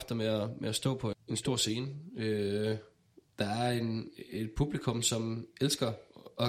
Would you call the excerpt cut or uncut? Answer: cut